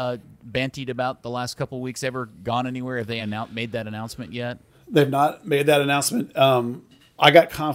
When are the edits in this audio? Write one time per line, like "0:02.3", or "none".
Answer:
none